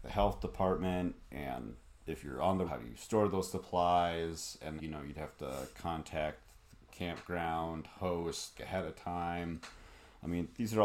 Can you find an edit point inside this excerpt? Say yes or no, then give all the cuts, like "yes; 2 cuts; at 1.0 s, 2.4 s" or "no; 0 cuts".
yes; 3 cuts; at 2.7 s, 4.8 s, 8.5 s